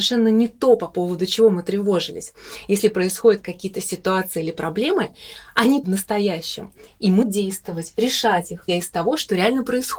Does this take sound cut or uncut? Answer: cut